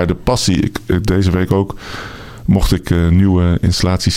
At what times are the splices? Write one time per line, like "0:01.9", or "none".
none